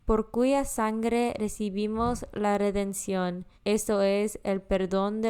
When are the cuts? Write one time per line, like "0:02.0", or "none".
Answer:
0:03.6